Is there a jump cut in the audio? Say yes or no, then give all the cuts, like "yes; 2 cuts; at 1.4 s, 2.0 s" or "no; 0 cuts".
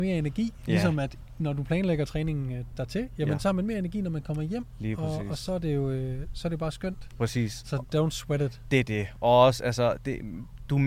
yes; 1 cut; at 7.2 s